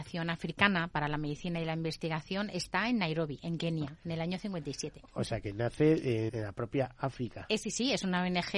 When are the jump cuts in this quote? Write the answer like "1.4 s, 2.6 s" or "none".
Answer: 6.3 s